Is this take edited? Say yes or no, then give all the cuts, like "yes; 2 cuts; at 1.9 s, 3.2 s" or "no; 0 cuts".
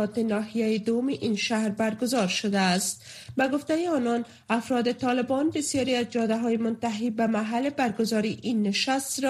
no; 0 cuts